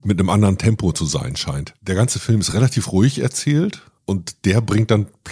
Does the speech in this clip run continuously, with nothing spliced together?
yes; 0 cuts

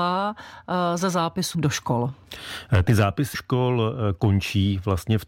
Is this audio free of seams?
no; 2 cuts; at 1.5 s, 3.3 s

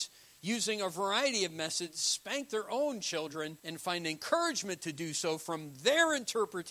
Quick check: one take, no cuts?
no; 1 cut; at 3.6 s

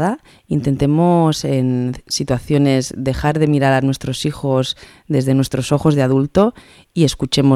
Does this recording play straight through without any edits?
yes; 0 cuts

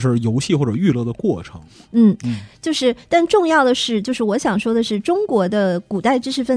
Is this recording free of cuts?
yes; 0 cuts

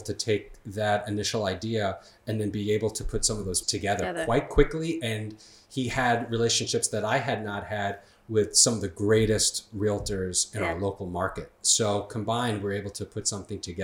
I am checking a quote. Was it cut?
yes; 1 cut; at 3.6 s

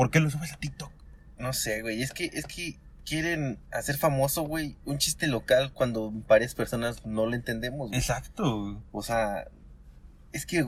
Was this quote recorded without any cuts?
yes; 0 cuts

